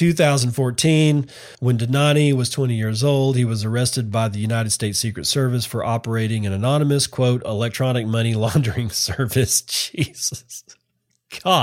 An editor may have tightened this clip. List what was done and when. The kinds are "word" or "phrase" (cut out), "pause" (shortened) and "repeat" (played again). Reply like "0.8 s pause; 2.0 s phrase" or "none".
1.5 s pause